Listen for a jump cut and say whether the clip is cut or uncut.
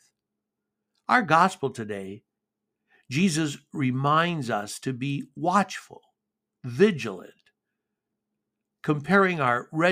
uncut